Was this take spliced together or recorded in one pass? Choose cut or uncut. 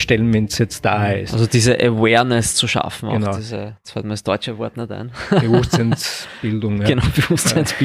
uncut